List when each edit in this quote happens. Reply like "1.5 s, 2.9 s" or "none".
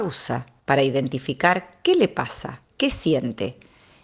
2.7 s